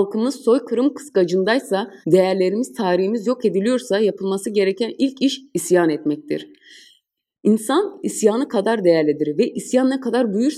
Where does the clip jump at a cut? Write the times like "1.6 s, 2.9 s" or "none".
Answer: 2.0 s